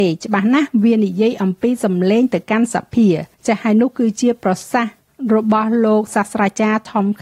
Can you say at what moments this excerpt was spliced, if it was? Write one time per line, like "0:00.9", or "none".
0:03.3